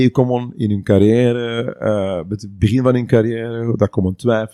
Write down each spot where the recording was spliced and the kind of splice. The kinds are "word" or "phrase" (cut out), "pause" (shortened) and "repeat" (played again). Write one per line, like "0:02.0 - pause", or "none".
none

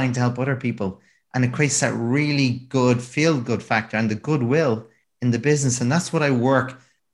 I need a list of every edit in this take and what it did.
none

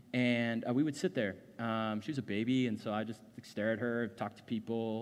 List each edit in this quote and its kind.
none

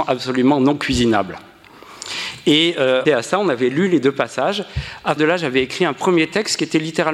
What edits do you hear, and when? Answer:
0:03.1 - phrase
0:05.2 - word

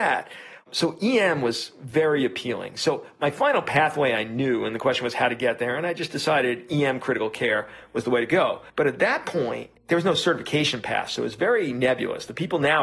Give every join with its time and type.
0:08.7 - pause
0:09.8 - pause

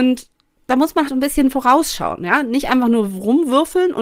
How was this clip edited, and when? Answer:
0:01.1 - word

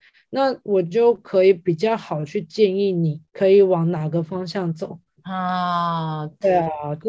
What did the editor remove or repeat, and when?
0:03.3 - pause

